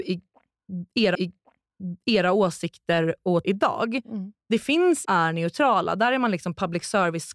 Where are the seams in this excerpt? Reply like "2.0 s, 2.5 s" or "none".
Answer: 1.1 s, 3.4 s, 5.0 s